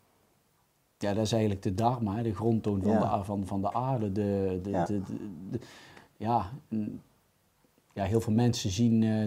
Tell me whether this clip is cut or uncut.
uncut